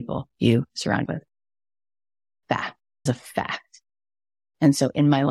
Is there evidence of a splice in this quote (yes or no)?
yes